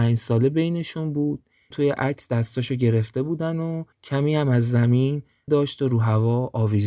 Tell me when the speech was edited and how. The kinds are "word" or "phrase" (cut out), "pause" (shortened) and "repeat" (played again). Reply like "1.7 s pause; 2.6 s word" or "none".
1.7 s phrase; 3.9 s pause; 5.5 s word